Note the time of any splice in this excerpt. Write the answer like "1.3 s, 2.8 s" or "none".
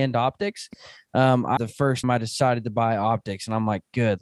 1.6 s, 2.0 s